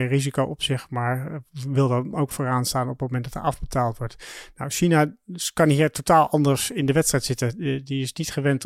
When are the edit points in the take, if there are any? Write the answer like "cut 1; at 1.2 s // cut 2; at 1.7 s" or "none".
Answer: cut 1; at 2.3 s

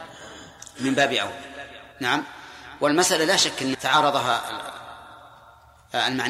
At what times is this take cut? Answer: cut 1; at 1.9 s // cut 2; at 3.7 s

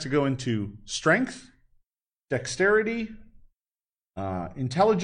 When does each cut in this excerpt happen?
none

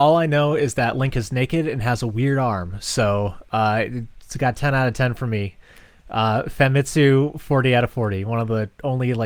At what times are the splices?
none

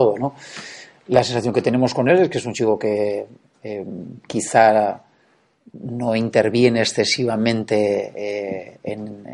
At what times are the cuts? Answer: none

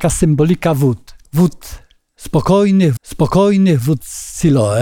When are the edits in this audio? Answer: cut 1; at 1.2 s // cut 2; at 3.0 s

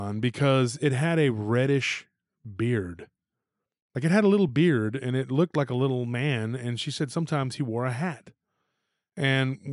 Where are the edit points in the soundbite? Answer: none

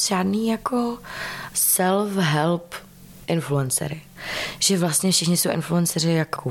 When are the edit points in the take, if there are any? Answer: none

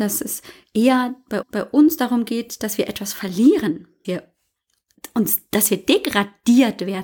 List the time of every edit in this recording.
cut 1; at 1.4 s // cut 2; at 4.0 s

